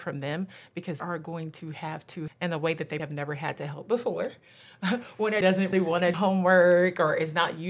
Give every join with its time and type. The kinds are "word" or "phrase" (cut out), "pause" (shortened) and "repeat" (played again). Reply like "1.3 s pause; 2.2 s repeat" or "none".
1.0 s word; 2.3 s word; 3.0 s word; 5.4 s word; 5.7 s word; 6.1 s word